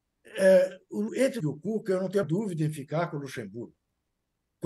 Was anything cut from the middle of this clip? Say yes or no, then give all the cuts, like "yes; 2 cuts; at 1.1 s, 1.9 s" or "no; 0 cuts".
yes; 3 cuts; at 1.1 s, 1.4 s, 2.2 s